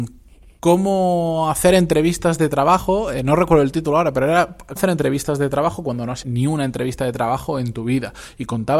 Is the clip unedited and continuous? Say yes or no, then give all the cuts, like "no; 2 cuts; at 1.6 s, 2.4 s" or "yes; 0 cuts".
no; 2 cuts; at 4.8 s, 6.2 s